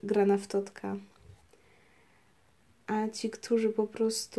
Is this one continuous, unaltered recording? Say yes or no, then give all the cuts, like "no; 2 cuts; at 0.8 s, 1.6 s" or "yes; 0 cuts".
yes; 0 cuts